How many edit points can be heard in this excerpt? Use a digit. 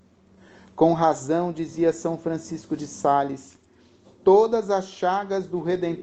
0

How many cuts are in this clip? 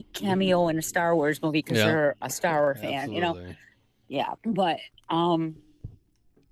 1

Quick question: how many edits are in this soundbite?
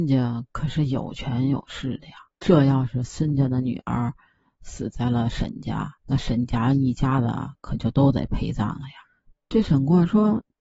1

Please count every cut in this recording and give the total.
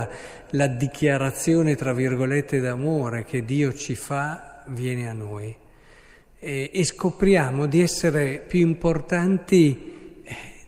0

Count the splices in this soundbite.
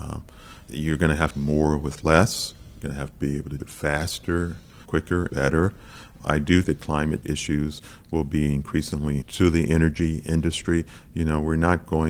9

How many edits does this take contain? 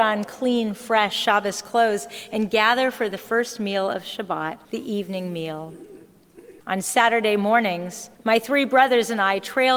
3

